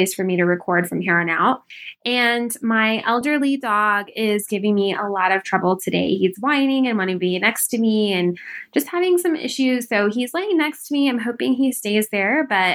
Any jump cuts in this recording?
no; 0 cuts

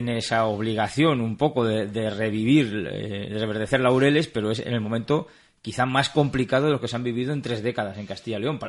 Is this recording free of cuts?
yes; 0 cuts

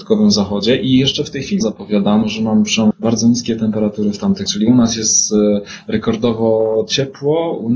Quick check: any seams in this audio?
yes; 4 cuts; at 1.6 s, 2.2 s, 2.9 s, 4.5 s

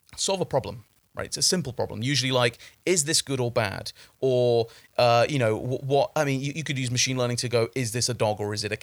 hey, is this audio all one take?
yes; 0 cuts

